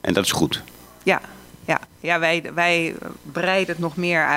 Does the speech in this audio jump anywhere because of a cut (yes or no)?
no